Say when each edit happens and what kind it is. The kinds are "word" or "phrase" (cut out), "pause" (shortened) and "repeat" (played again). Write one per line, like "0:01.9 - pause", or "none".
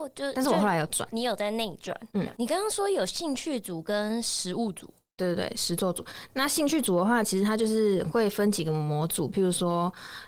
none